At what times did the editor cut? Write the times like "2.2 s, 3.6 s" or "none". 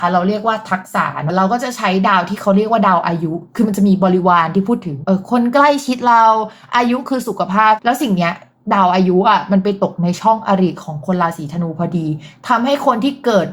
none